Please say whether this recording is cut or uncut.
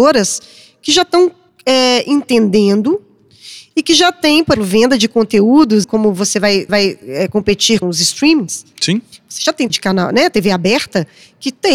cut